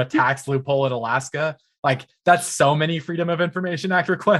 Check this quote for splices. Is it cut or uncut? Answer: uncut